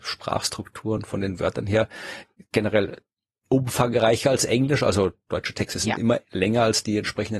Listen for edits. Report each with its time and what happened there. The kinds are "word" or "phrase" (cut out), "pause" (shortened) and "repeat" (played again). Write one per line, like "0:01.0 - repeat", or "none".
none